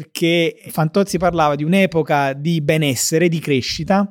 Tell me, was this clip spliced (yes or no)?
no